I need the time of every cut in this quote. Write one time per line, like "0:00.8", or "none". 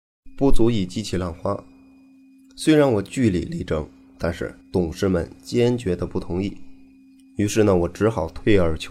0:04.6